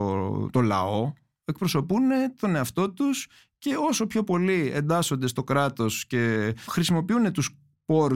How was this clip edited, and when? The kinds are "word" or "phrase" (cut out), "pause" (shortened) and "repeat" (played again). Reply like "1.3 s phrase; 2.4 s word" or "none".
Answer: none